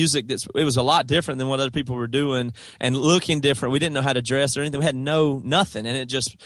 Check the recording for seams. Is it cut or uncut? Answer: uncut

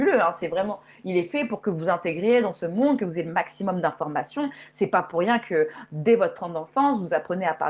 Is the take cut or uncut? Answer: uncut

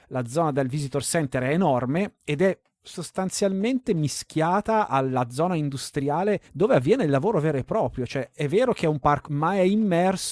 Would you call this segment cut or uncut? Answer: cut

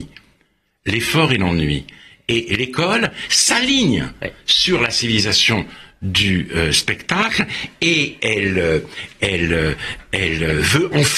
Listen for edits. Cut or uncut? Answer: uncut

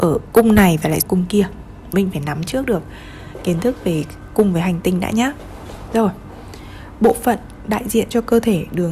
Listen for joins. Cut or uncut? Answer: cut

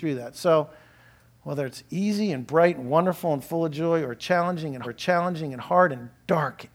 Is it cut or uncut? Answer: cut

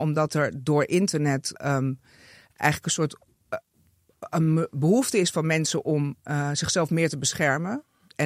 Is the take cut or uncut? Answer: cut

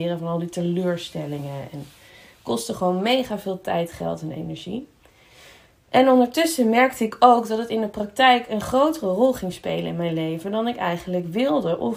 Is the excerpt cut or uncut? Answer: uncut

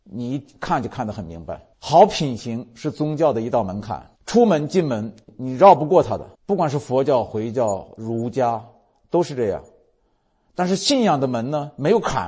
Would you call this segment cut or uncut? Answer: cut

